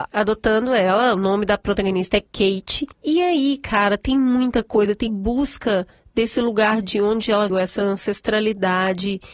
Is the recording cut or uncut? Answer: cut